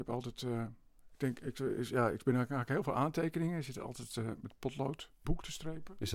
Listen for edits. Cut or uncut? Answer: cut